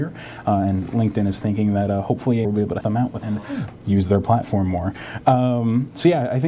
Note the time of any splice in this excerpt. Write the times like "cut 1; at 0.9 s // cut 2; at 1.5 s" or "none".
cut 1; at 2.4 s // cut 2; at 2.8 s // cut 3; at 3.2 s